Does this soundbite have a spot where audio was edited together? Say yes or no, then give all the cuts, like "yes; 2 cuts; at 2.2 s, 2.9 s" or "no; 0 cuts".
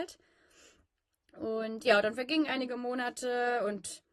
no; 0 cuts